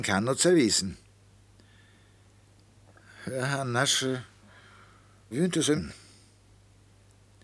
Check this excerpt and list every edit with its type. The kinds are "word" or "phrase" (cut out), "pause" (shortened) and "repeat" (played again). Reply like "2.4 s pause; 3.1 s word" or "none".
5.3 s word; 5.8 s word